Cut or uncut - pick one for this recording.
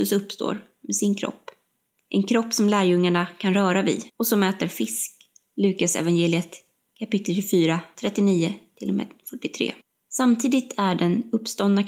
cut